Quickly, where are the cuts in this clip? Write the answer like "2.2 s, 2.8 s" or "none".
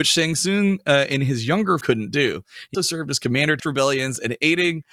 1.8 s, 2.7 s, 3.6 s